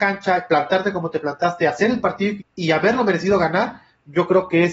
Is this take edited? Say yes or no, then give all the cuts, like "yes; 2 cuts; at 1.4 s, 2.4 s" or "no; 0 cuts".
yes; 1 cut; at 2.4 s